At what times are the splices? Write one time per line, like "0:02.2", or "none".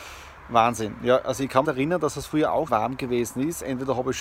0:01.6
0:02.7

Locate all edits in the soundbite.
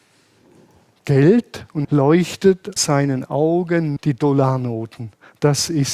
0:01.8
0:02.8
0:04.0

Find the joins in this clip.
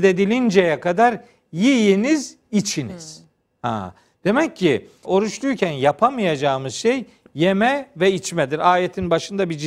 0:05.0

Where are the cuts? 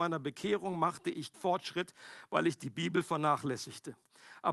0:01.3

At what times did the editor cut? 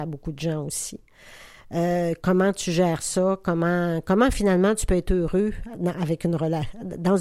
none

